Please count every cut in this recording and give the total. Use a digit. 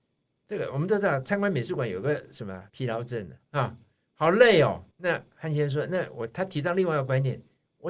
3